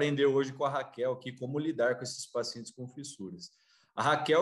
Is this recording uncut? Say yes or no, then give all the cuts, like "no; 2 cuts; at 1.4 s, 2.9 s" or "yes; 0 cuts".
yes; 0 cuts